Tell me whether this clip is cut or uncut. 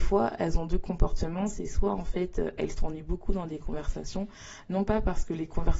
uncut